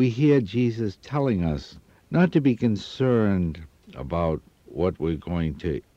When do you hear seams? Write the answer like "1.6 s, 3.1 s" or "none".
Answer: none

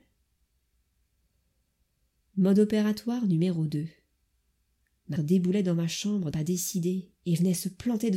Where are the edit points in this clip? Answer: 5.2 s, 6.3 s

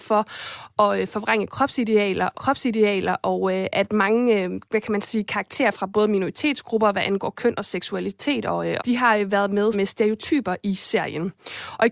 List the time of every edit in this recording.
2.3 s, 4.6 s, 8.8 s, 9.7 s

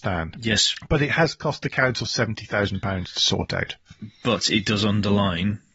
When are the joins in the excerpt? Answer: none

